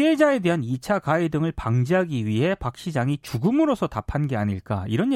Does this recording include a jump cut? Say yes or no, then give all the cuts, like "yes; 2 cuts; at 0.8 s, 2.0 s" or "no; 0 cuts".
no; 0 cuts